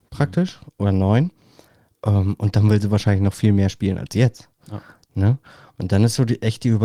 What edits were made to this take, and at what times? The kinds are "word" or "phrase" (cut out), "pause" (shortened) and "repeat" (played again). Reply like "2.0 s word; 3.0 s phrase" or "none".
none

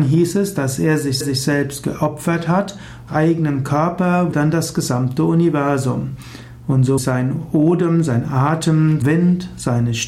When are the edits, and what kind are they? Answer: 1.2 s repeat; 3.1 s phrase; 4.3 s word; 7.0 s word; 9.0 s word

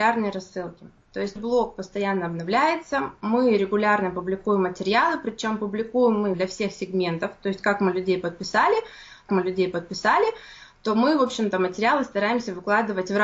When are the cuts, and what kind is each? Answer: 1.4 s word; 6.3 s phrase; 9.3 s repeat

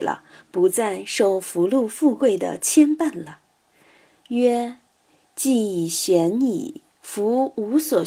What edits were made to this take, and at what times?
none

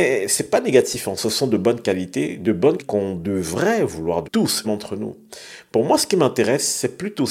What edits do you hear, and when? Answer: 2.8 s word; 4.2 s word; 4.6 s word

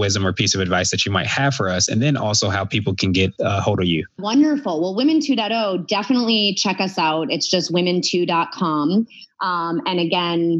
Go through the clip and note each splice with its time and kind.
none

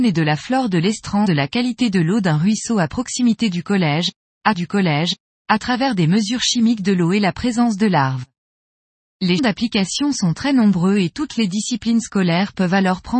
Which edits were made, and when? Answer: 1.2 s phrase; 4.5 s repeat; 9.4 s word

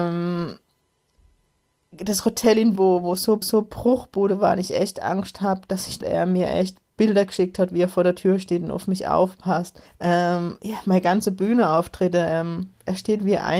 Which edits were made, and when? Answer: 2.8 s word; 3.4 s repeat; 6.0 s phrase; 6.8 s pause; 9.9 s pause

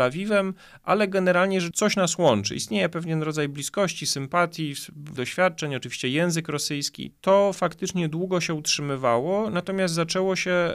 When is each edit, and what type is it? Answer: 1.7 s word; 5.2 s word

